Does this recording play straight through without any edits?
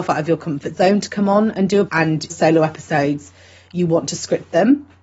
no; 2 cuts; at 1.9 s, 2.3 s

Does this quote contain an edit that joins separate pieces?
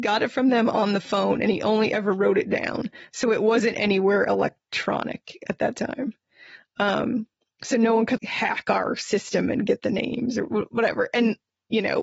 no; 0 cuts

